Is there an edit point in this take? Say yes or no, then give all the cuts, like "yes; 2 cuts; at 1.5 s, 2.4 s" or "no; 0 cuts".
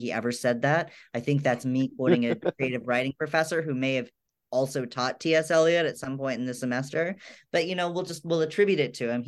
no; 0 cuts